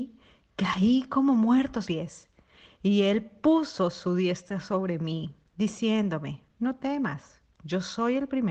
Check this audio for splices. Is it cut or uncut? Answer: cut